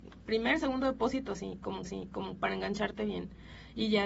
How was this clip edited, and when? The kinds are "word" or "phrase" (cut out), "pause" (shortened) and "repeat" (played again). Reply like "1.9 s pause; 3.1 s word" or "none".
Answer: 1.8 s repeat